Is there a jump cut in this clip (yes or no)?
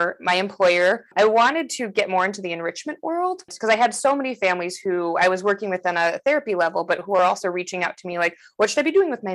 no